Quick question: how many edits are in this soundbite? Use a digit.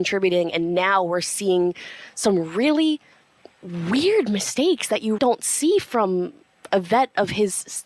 2